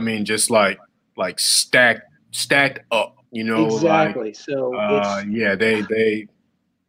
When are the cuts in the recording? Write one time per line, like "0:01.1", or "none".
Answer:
0:03.3